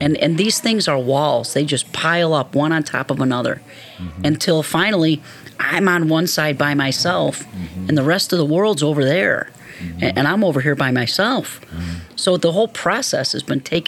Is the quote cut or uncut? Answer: cut